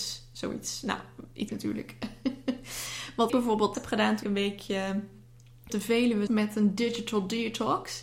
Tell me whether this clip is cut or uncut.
cut